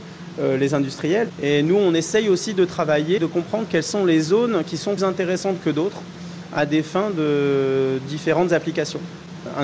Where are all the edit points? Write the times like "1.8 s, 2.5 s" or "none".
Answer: 3.2 s, 5.0 s

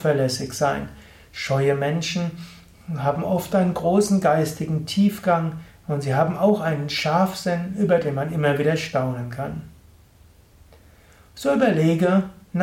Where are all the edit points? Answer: none

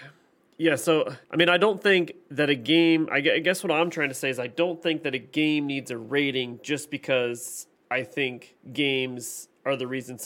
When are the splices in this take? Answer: 1.2 s, 8.6 s

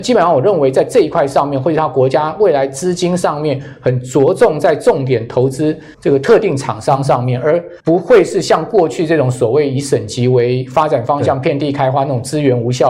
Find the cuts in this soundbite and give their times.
5.9 s, 7.8 s

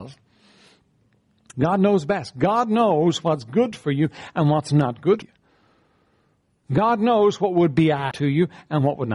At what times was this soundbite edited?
5.2 s, 8.1 s

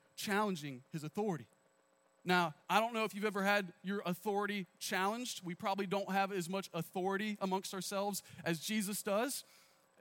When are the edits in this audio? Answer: 2.6 s

